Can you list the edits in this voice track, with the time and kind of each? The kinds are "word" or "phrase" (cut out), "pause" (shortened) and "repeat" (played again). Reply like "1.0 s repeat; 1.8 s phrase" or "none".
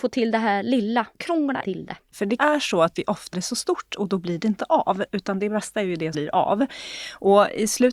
1.6 s word; 2.4 s word; 3.3 s word; 6.1 s word